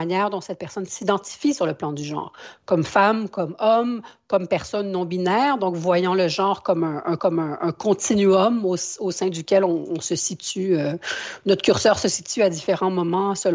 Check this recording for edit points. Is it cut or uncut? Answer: cut